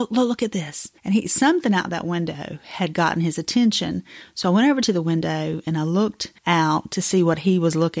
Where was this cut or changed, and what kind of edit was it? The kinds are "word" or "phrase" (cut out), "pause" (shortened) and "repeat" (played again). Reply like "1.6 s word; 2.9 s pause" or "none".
1.0 s pause; 6.4 s pause